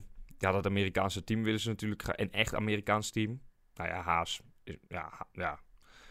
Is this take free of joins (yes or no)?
yes